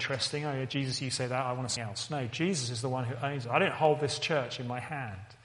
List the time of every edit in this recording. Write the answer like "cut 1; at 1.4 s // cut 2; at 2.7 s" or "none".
cut 1; at 1.8 s